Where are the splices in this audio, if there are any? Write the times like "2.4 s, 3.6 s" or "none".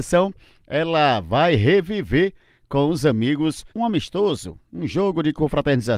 3.7 s